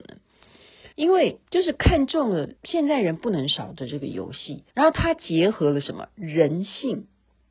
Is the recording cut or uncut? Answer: cut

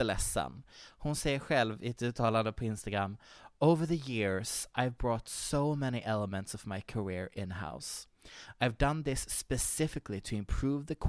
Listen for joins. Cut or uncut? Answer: uncut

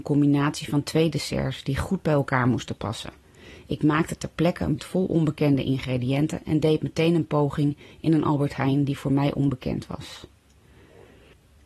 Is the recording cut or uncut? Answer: cut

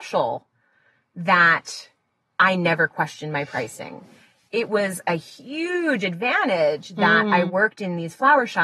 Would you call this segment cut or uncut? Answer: uncut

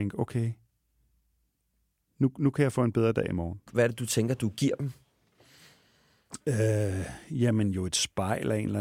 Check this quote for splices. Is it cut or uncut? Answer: uncut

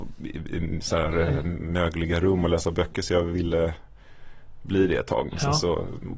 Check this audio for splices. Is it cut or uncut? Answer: uncut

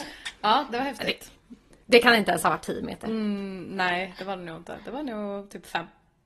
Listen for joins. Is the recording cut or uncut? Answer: uncut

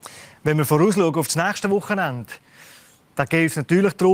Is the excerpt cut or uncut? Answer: uncut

